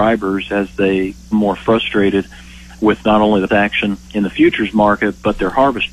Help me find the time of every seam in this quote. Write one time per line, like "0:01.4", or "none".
0:01.3
0:03.5
0:04.0